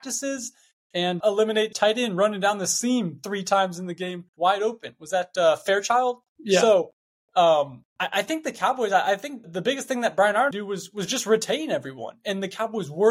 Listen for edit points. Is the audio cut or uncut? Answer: cut